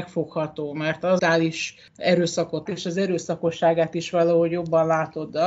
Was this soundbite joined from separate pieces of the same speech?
yes; 2 cuts; at 1.2 s, 2.7 s

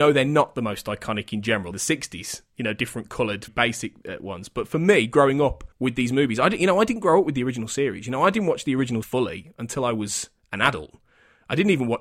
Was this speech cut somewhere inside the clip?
yes; 4 cuts; at 1.7 s, 3.5 s, 5.7 s, 9.0 s

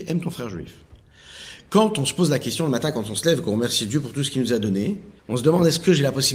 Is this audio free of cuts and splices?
no; 1 cut; at 5.2 s

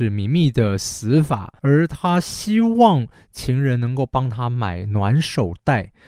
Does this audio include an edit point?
yes; 1 cut; at 1.6 s

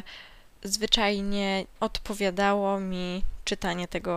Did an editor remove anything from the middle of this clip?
yes; 1 cut; at 1.8 s

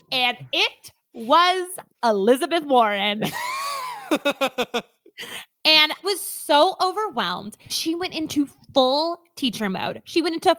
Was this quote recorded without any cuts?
no; 3 cuts; at 1.9 s, 6.0 s, 7.7 s

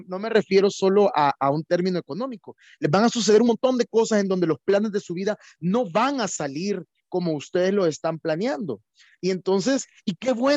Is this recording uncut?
yes; 0 cuts

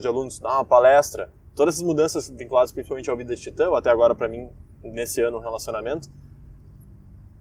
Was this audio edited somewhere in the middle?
no; 0 cuts

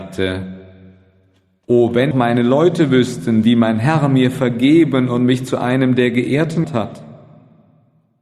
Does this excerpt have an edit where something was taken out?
yes; 2 cuts; at 2.1 s, 6.6 s

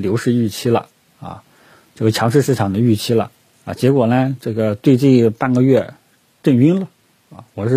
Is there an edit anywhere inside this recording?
no; 0 cuts

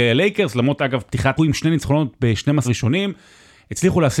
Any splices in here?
yes; 2 cuts; at 1.4 s, 2.6 s

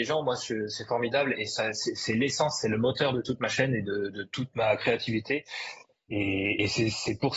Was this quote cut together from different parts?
no; 0 cuts

